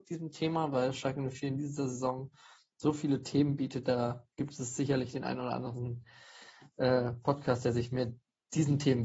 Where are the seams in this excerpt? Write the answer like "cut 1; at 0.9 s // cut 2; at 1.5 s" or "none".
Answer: cut 1; at 4.3 s